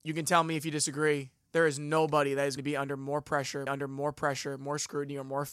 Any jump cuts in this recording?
yes; 2 cuts; at 2.6 s, 3.7 s

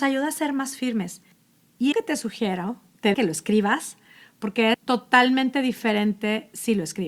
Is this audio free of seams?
no; 3 cuts; at 1.9 s, 3.1 s, 4.7 s

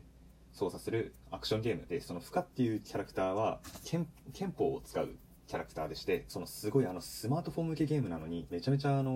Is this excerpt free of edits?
yes; 0 cuts

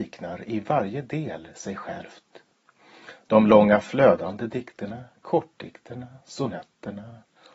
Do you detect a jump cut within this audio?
no; 0 cuts

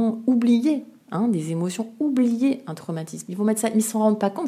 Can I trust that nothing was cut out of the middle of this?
yes; 0 cuts

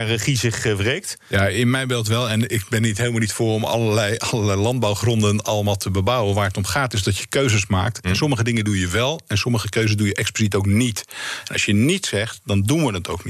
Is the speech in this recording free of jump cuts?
yes; 0 cuts

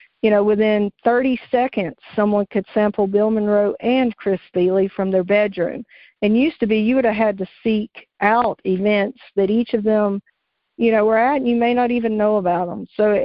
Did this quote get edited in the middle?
no; 0 cuts

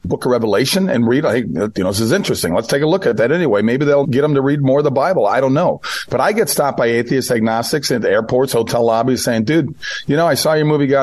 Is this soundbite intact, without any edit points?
no; 1 cut; at 4.0 s

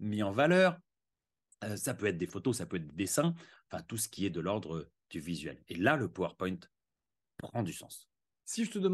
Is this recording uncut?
yes; 0 cuts

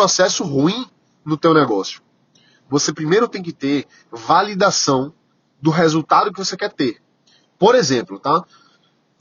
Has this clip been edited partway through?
no; 0 cuts

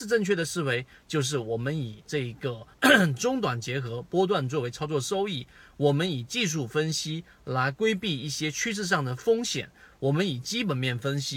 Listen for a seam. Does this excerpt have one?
yes; 1 cut; at 2.7 s

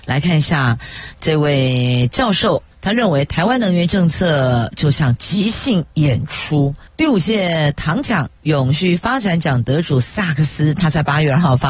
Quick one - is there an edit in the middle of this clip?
yes; 2 cuts; at 2.7 s, 6.9 s

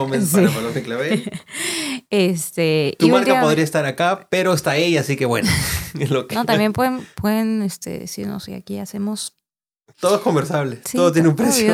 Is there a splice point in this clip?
no; 0 cuts

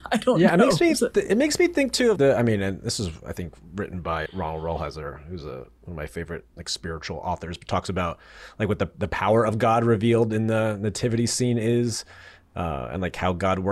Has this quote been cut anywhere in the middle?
yes; 2 cuts; at 2.2 s, 4.3 s

